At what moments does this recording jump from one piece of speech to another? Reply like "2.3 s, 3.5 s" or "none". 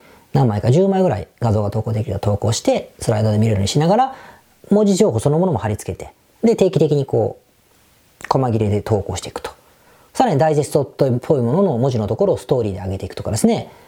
none